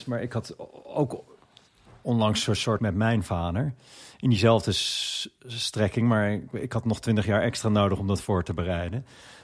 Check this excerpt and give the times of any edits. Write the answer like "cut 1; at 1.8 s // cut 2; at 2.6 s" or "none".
cut 1; at 2.8 s